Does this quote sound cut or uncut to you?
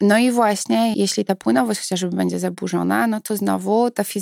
cut